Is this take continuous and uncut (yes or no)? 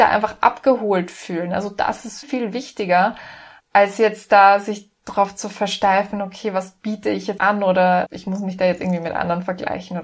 no